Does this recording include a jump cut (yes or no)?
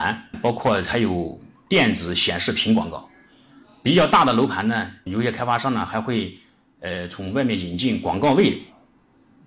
no